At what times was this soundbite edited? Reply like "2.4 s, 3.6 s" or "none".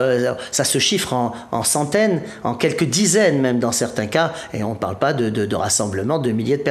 none